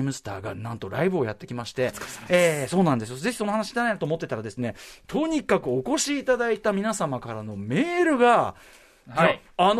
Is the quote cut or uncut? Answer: uncut